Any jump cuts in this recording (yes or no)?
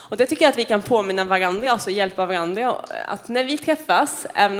no